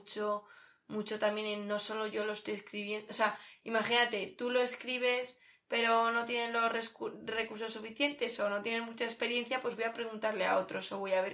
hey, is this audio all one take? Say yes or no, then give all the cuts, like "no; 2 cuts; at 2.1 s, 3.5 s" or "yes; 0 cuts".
yes; 0 cuts